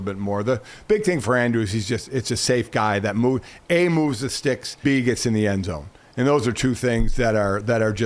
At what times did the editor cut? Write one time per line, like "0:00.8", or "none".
0:04.8